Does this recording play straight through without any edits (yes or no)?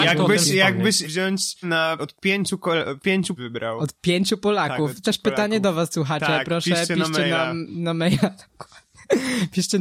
no